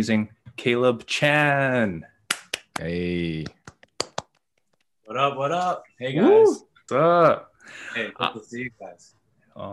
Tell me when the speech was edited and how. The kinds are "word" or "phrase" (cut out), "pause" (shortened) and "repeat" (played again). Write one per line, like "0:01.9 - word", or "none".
0:06.9 - word

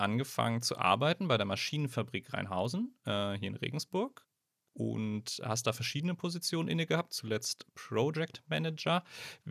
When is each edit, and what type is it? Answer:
none

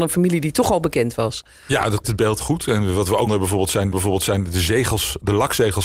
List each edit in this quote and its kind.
0:02.0 - word
0:02.4 - word
0:03.3 - word
0:03.9 - repeat

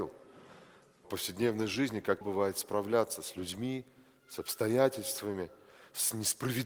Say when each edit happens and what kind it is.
0:02.2 - word

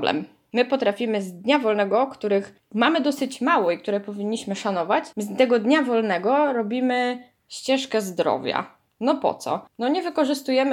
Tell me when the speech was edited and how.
0:05.1 - pause

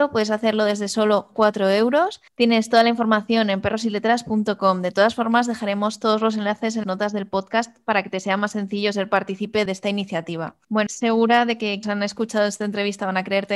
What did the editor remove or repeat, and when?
0:02.3 - pause
0:06.8 - word
0:09.7 - word
0:10.9 - phrase
0:11.8 - word

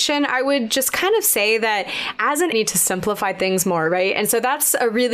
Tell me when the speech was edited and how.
0:02.5 - phrase

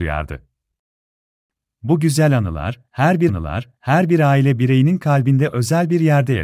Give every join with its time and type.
0:03.3 - repeat

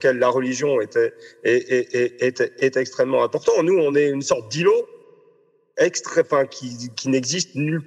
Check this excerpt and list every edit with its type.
none

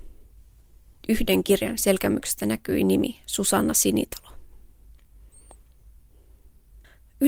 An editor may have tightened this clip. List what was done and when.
none

